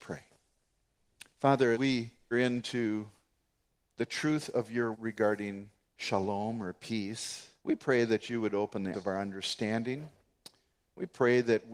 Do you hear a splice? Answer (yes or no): yes